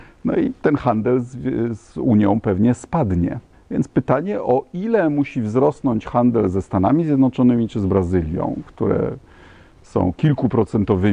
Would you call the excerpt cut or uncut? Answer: cut